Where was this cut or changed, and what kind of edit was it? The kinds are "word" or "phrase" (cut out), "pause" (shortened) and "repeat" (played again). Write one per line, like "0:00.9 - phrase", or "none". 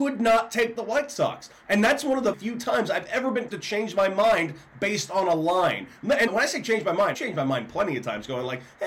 0:02.3 - word
0:03.5 - word
0:06.3 - word
0:07.1 - word

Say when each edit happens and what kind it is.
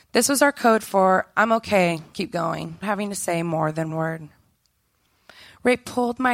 0:02.1 - word
0:02.8 - word
0:03.9 - word

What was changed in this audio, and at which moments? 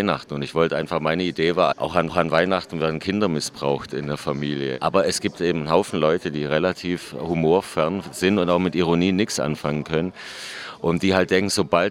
0:01.7 - word
0:02.1 - repeat

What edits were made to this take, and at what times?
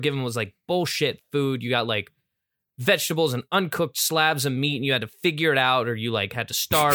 none

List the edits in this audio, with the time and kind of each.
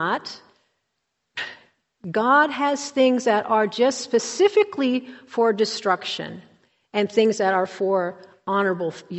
none

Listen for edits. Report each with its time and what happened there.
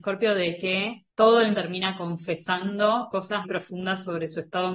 0:01.1 - pause
0:01.5 - word
0:03.4 - word

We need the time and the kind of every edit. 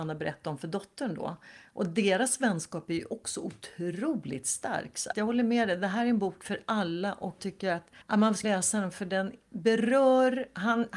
0:05.1 - word
0:07.4 - word
0:08.4 - word

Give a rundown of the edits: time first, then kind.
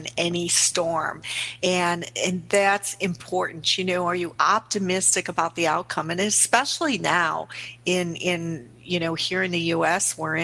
none

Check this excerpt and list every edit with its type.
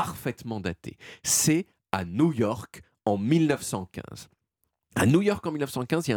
none

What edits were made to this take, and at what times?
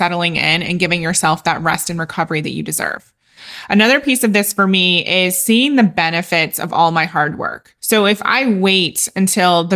0:07.8 - pause

